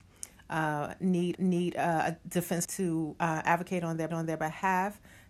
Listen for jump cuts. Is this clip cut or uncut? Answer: cut